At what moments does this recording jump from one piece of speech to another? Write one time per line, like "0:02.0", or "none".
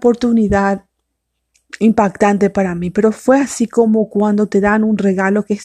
none